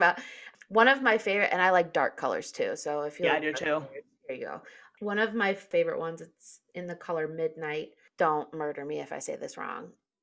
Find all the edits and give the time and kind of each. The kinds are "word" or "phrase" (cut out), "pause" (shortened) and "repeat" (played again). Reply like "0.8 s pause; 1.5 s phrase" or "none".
none